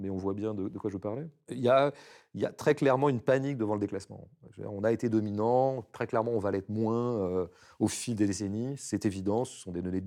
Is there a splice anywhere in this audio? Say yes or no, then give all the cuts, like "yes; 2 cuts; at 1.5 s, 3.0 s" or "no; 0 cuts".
no; 0 cuts